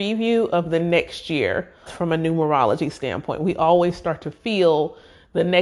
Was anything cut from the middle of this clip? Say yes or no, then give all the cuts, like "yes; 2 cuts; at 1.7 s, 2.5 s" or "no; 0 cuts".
yes; 1 cut; at 1.9 s